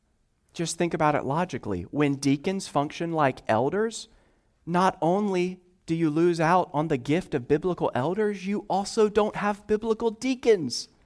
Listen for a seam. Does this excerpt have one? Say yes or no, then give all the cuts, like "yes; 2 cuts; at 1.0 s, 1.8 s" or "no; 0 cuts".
no; 0 cuts